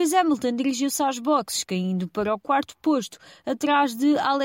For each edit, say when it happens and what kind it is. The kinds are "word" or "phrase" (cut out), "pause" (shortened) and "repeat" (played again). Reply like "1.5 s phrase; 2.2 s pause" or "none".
none